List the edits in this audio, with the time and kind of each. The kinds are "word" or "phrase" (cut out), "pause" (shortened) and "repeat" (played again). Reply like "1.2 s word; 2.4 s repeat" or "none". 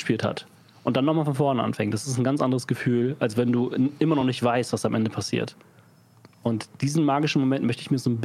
none